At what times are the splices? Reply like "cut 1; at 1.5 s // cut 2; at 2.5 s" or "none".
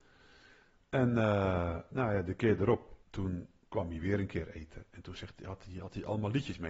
cut 1; at 3.0 s

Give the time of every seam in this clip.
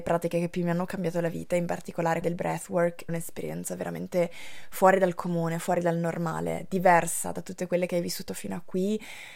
cut 1; at 2.2 s // cut 2; at 3.1 s

